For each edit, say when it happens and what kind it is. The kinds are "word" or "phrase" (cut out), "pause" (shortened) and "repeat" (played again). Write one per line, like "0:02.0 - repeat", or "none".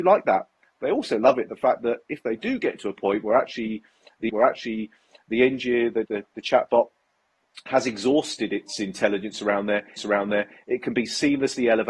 0:04.3 - repeat
0:06.1 - word
0:10.0 - repeat